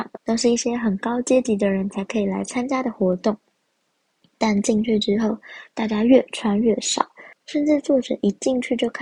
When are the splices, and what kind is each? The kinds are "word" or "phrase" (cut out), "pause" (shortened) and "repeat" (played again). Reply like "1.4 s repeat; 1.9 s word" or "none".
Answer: none